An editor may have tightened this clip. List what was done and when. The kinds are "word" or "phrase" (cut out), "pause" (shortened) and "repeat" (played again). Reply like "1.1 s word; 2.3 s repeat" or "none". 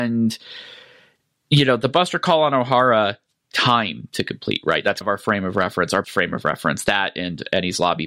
3.5 s word; 5.0 s word; 6.0 s word